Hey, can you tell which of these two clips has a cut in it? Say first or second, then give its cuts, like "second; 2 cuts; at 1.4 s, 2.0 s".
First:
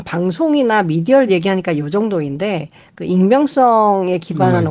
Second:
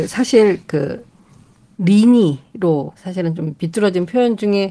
second; 2 cuts; at 1.7 s, 2.9 s